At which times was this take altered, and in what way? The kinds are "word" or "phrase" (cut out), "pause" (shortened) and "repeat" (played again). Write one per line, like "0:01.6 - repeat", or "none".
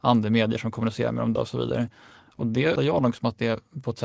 0:01.4 - word
0:02.8 - word